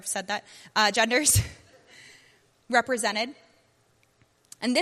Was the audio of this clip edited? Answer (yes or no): yes